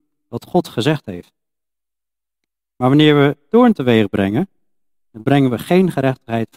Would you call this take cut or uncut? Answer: uncut